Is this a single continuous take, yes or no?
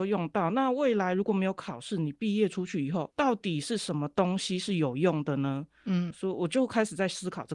no